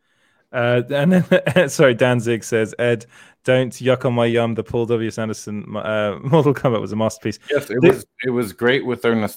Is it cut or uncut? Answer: uncut